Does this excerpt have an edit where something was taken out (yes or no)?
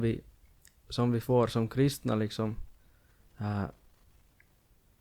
no